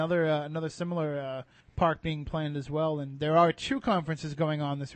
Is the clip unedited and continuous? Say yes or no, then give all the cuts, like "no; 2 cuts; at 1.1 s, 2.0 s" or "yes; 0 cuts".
no; 1 cut; at 1.6 s